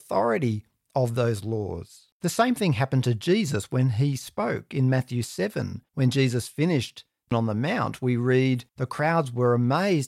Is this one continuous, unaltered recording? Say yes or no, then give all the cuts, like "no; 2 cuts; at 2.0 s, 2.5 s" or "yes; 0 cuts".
no; 4 cuts; at 2.1 s, 5.9 s, 7.3 s, 8.7 s